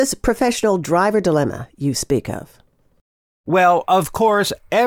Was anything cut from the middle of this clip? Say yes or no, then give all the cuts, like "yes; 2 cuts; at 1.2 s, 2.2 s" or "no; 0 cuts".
no; 0 cuts